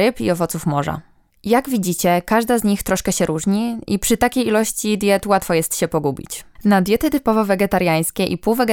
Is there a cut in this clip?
no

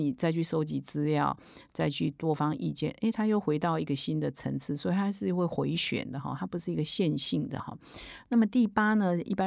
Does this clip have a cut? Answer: no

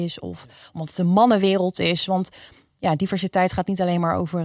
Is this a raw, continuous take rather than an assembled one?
yes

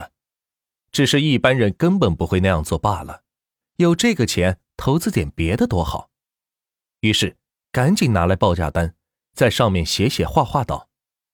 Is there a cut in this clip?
no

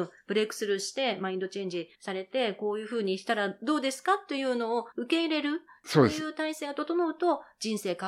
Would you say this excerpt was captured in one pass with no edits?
no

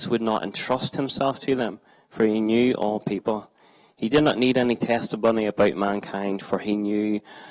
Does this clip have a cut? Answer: no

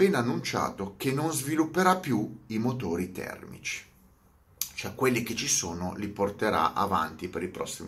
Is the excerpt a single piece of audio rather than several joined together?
yes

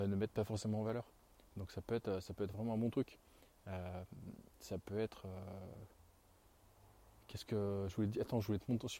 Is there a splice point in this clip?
no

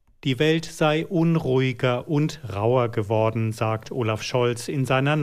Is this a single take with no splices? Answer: yes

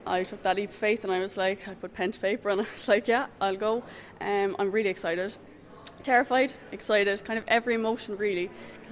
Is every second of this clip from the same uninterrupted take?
yes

